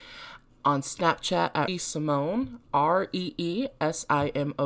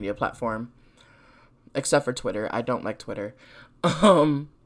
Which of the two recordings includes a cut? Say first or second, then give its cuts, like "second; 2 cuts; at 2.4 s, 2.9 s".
first; 1 cut; at 1.7 s